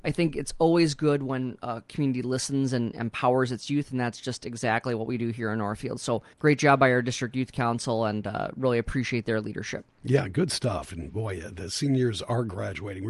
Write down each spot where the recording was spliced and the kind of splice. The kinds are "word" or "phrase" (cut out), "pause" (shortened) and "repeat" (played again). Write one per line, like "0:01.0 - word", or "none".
0:06.3 - pause